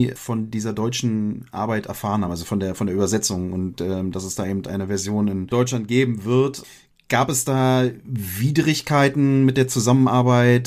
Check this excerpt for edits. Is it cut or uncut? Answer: uncut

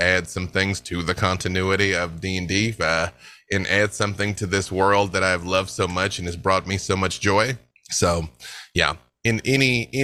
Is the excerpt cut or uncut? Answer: uncut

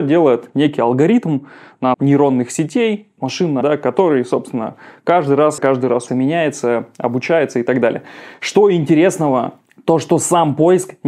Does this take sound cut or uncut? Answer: cut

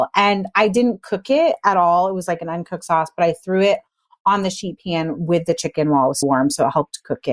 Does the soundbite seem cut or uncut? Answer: cut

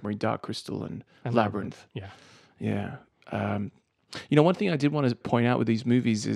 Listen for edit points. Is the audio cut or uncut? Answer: cut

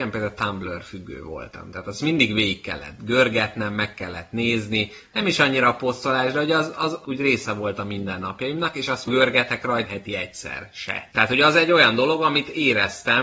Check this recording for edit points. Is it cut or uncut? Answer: cut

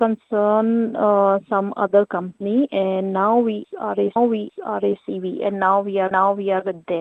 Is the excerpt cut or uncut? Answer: cut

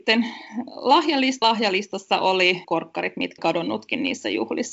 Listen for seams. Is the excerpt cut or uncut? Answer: cut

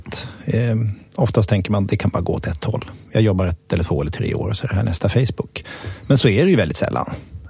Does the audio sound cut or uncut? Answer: uncut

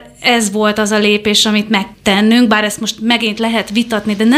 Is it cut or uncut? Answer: cut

